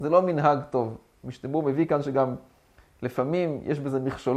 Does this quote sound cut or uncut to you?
uncut